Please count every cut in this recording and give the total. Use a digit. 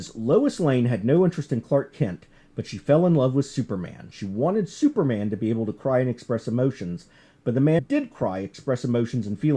1